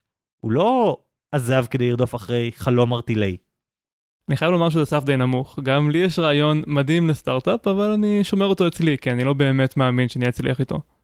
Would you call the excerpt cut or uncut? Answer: uncut